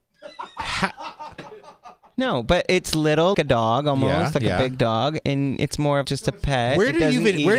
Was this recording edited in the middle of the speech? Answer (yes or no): yes